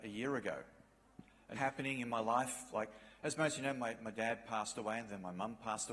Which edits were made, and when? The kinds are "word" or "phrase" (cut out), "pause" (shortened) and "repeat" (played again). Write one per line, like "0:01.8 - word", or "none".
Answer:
0:01.5 - phrase